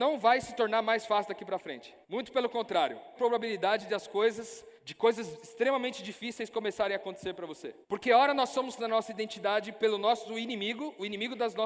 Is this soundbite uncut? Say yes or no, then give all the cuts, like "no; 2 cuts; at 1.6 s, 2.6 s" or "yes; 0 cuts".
no; 5 cuts; at 2.0 s, 3.2 s, 4.8 s, 7.8 s, 8.8 s